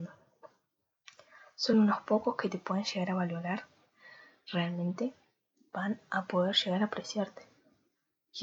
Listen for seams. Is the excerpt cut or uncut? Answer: uncut